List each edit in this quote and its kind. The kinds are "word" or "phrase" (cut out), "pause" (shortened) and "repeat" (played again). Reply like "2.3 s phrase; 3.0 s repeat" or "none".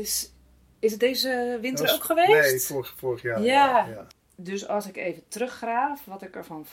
none